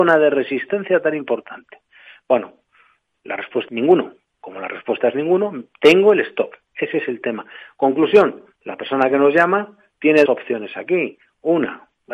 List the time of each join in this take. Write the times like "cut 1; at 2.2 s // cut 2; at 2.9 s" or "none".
cut 1; at 3.7 s // cut 2; at 10.3 s